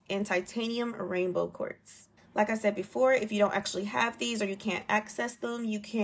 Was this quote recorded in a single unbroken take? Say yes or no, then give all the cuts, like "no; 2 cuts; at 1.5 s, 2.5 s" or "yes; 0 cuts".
no; 1 cut; at 2.2 s